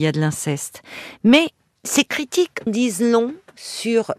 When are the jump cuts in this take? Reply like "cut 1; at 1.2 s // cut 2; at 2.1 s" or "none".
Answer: cut 1; at 2.7 s